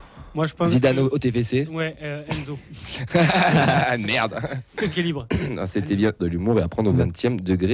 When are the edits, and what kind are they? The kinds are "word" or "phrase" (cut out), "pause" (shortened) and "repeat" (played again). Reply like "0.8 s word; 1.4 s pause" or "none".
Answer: 4.9 s word; 6.2 s phrase